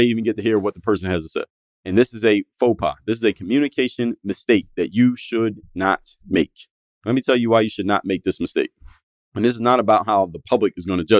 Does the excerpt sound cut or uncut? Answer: uncut